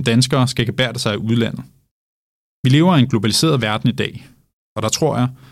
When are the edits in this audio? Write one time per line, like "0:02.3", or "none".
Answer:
none